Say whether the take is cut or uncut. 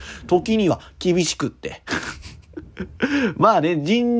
cut